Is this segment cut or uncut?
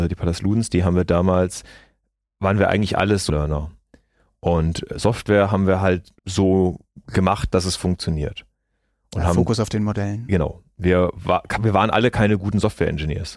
cut